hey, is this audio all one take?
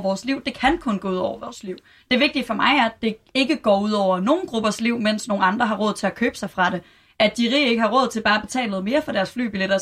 yes; 0 cuts

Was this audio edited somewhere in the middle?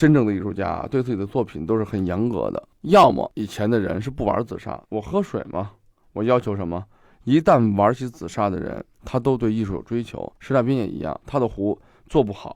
yes; 3 cuts; at 4.8 s, 8.9 s, 10.4 s

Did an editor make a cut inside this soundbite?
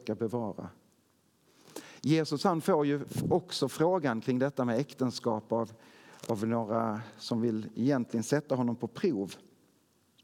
no; 0 cuts

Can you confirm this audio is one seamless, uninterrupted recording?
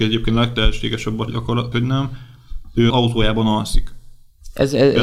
no; 3 cuts; at 1.3 s, 1.7 s, 2.9 s

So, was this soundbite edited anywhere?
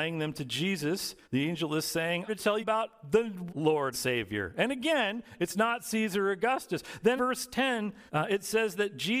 yes; 7 cuts; at 1.2 s, 2.3 s, 2.6 s, 3.5 s, 3.9 s, 7.2 s, 8.1 s

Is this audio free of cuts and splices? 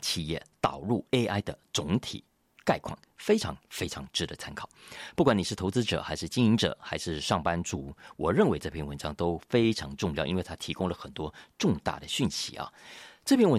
yes; 0 cuts

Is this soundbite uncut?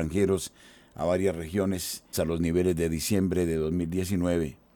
no; 1 cut; at 2.1 s

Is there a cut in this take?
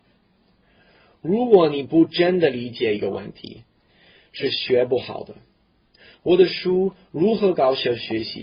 no; 0 cuts

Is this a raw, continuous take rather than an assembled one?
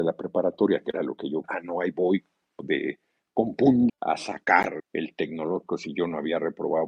no; 3 cuts; at 1.4 s, 3.9 s, 4.8 s

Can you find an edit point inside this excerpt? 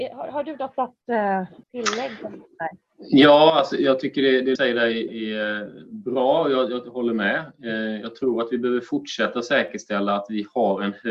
yes; 3 cuts; at 1.6 s, 4.6 s, 5.1 s

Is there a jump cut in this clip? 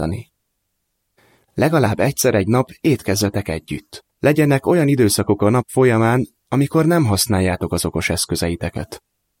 yes; 1 cut; at 4.1 s

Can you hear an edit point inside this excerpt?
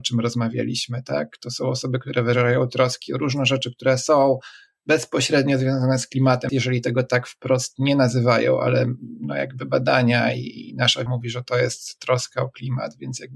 yes; 2 cuts; at 6.5 s, 11.1 s

